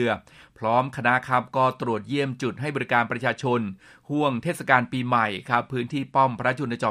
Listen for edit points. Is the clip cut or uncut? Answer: uncut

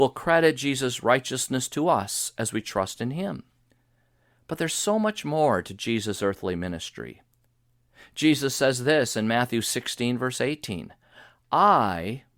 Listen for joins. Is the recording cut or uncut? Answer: uncut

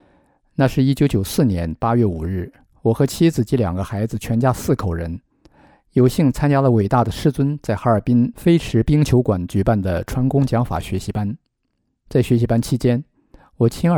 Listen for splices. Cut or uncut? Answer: uncut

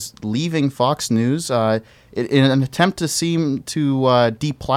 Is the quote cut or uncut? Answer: uncut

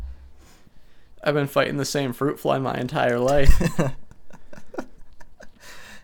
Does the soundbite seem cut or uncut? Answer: uncut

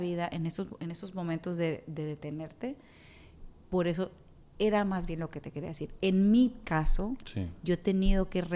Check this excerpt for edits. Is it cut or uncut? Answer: uncut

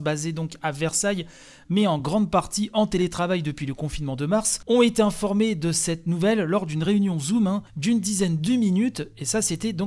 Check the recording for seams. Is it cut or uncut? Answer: uncut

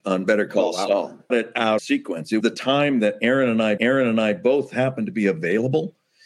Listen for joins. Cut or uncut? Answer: cut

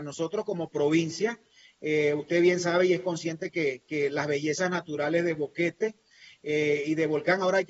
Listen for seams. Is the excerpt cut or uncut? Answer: uncut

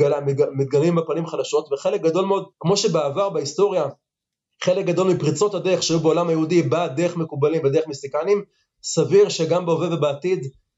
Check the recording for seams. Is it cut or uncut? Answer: cut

